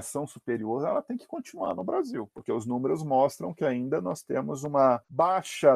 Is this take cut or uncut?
uncut